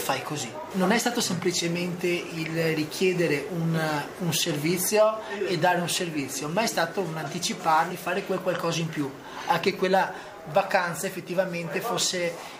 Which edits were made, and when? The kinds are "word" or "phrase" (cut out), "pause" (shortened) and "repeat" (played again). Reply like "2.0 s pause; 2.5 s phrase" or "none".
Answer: 7.9 s phrase